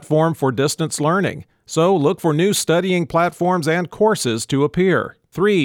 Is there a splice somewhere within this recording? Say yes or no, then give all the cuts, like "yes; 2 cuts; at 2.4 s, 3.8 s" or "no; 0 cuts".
no; 0 cuts